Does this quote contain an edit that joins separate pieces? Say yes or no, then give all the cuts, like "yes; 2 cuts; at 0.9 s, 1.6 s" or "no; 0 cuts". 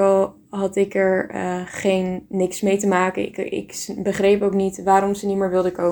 no; 0 cuts